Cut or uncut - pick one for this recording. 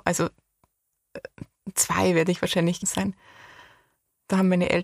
cut